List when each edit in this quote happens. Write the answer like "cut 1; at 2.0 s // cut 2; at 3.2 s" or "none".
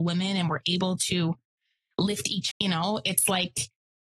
cut 1; at 2.5 s

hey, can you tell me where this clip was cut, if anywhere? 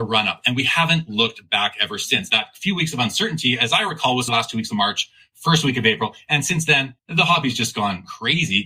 cut 1; at 7.0 s

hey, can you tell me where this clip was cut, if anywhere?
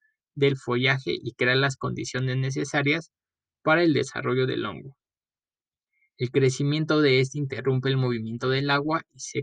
none

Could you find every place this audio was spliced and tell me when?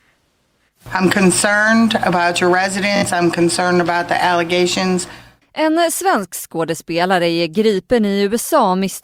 none

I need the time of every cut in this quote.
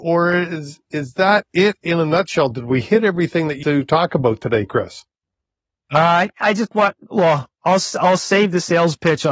cut 1; at 3.6 s // cut 2; at 7.5 s

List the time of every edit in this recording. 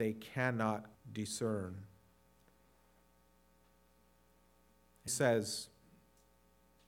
cut 1; at 0.9 s // cut 2; at 5.1 s

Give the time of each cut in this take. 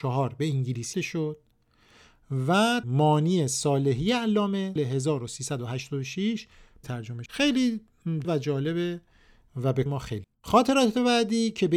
cut 1; at 0.9 s // cut 2; at 2.8 s // cut 3; at 4.8 s // cut 4; at 6.8 s // cut 5; at 7.3 s // cut 6; at 8.2 s // cut 7; at 9.9 s // cut 8; at 10.2 s

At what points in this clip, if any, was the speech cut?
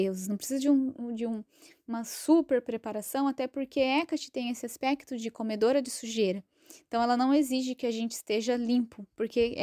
none

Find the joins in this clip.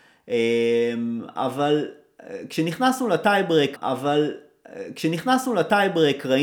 cut 1; at 3.8 s

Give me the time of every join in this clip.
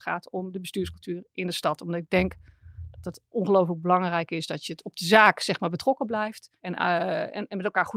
cut 1; at 6.6 s

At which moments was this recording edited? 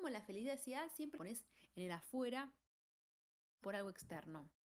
cut 1; at 1.2 s // cut 2; at 3.6 s

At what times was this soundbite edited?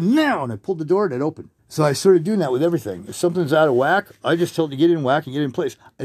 cut 1; at 1.6 s

